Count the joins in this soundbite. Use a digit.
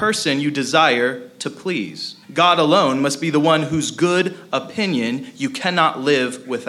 1